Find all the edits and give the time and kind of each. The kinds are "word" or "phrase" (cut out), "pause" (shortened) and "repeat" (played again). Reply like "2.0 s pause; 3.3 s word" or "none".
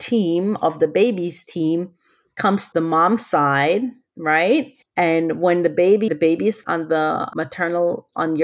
2.7 s word; 4.8 s pause; 6.1 s phrase; 6.6 s word